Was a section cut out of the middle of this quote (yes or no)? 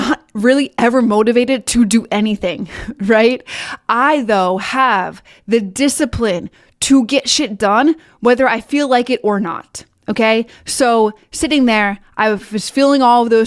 no